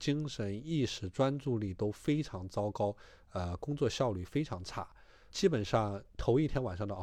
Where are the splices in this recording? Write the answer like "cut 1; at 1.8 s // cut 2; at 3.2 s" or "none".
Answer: cut 1; at 5.3 s